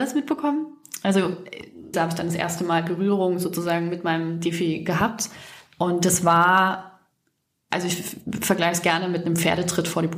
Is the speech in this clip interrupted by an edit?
yes; 1 cut; at 1.9 s

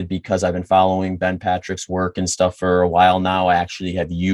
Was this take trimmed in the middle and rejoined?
no; 0 cuts

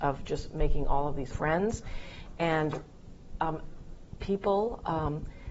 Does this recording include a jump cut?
yes; 2 cuts; at 1.3 s, 4.2 s

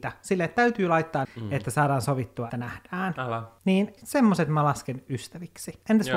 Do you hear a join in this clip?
yes; 3 cuts; at 1.2 s, 2.5 s, 4.0 s

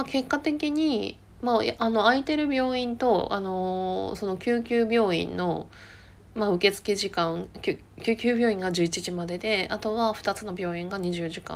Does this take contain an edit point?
yes; 1 cut; at 6.2 s

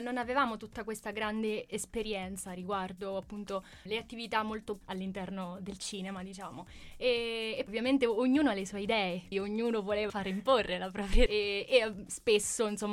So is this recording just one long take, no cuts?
no; 6 cuts; at 3.9 s, 4.8 s, 7.7 s, 9.3 s, 10.1 s, 11.3 s

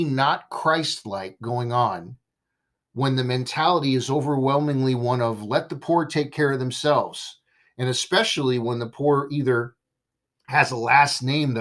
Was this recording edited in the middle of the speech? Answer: no; 0 cuts

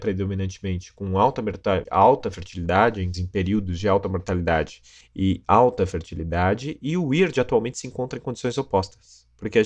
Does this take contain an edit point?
yes; 3 cuts; at 1.8 s, 3.1 s, 5.0 s

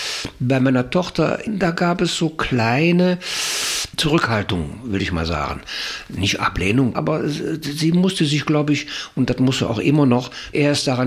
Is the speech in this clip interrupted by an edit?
no; 0 cuts

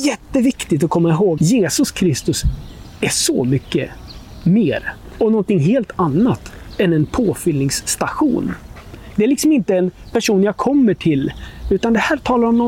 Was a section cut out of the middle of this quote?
yes; 1 cut; at 1.4 s

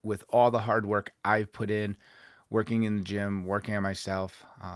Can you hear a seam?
no; 0 cuts

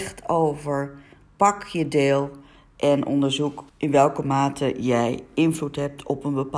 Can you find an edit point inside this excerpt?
yes; 1 cut; at 3.7 s

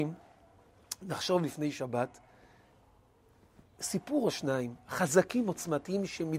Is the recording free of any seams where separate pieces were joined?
yes; 0 cuts

